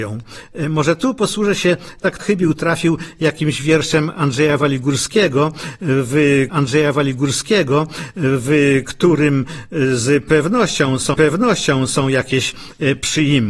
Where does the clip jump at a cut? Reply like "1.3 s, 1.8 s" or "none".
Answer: 2.2 s, 6.5 s, 11.1 s